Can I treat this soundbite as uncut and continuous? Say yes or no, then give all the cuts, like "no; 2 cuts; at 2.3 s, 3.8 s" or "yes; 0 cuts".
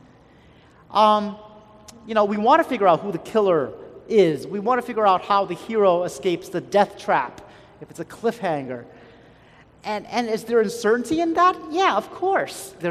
yes; 0 cuts